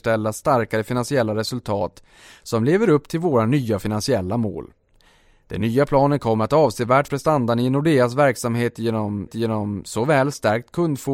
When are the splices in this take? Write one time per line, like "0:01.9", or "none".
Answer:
0:07.1
0:09.3